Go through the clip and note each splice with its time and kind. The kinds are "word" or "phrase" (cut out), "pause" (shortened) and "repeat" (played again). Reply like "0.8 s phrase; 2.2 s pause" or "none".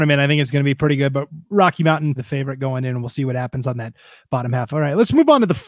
2.2 s word